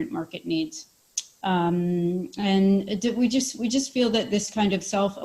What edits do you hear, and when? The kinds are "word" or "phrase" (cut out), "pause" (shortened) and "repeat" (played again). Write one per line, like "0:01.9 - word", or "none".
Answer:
none